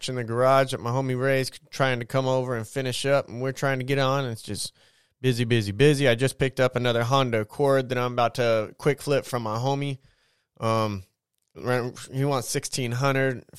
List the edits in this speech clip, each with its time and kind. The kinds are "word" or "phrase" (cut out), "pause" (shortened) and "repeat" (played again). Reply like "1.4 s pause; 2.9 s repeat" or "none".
none